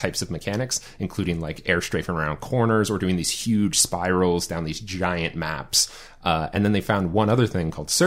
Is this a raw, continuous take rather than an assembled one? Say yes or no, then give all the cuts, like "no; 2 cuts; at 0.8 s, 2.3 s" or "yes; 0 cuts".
yes; 0 cuts